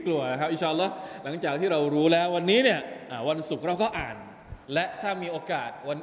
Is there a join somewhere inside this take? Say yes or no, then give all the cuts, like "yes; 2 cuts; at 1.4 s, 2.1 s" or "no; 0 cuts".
yes; 1 cut; at 4.6 s